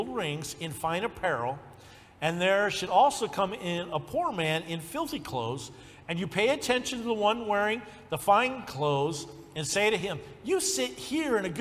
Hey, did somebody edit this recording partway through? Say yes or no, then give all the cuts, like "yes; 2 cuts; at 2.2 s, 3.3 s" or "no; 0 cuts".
no; 0 cuts